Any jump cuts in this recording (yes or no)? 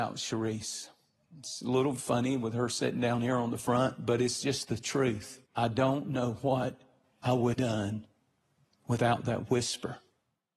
yes